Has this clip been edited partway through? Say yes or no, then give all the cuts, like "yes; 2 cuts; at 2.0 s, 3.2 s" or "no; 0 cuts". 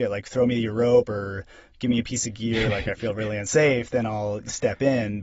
no; 0 cuts